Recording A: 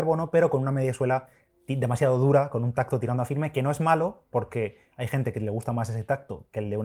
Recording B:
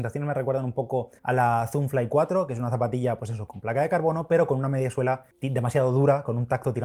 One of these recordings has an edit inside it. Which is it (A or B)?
B